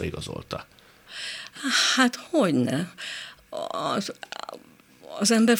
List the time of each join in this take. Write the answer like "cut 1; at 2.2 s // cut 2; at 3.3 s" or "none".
cut 1; at 2.3 s